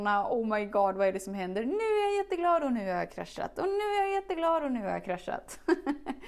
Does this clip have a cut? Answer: no; 0 cuts

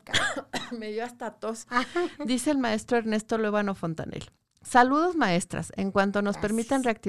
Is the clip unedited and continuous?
yes; 0 cuts

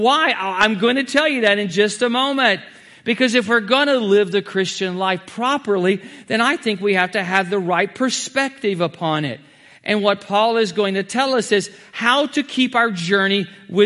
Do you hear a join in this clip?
no; 0 cuts

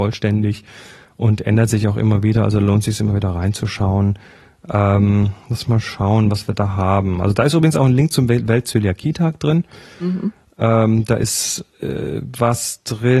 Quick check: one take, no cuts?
yes; 0 cuts

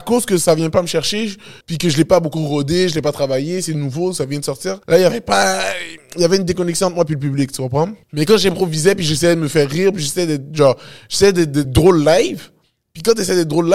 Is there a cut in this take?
yes; 4 cuts; at 1.6 s, 4.8 s, 8.0 s, 11.6 s

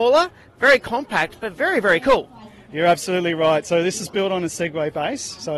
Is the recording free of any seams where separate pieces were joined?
yes; 0 cuts

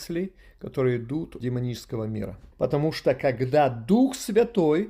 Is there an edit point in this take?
yes; 2 cuts; at 1.4 s, 2.5 s

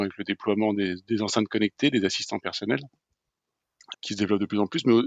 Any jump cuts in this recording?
yes; 1 cut; at 3.9 s

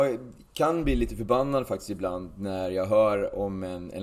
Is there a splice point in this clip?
no; 0 cuts

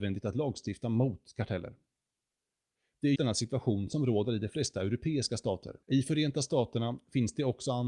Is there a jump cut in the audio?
yes; 2 cuts; at 3.2 s, 5.8 s

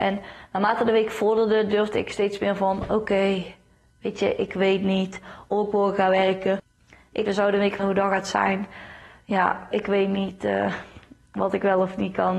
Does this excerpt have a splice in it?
yes; 3 cuts; at 7.3 s, 7.8 s, 9.7 s

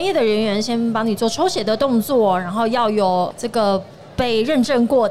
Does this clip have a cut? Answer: no; 0 cuts

